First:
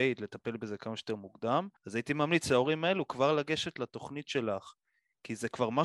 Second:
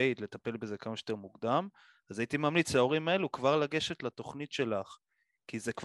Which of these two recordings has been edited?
first; 1 cut; at 1.8 s

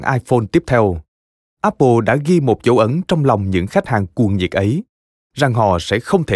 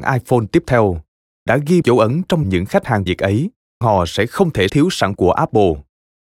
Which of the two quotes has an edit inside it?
second; 7 cuts; at 1.5 s, 1.8 s, 2.4 s, 3.1 s, 3.8 s, 4.7 s, 5.2 s

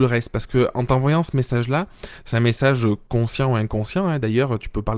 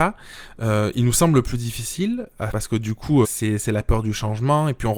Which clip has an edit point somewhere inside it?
second; 2 cuts; at 2.5 s, 3.2 s

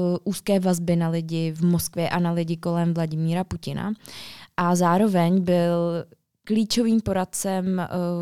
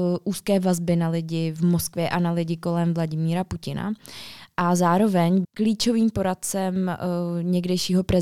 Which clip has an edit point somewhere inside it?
second; 1 cut; at 5.4 s

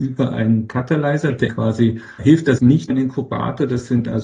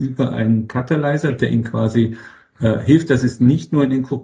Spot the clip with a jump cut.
first; 4 cuts; at 1.5 s, 2.2 s, 2.6 s, 2.9 s

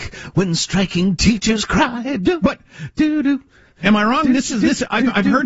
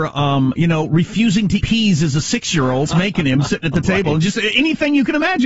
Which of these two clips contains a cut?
second; 2 cuts; at 1.6 s, 2.9 s

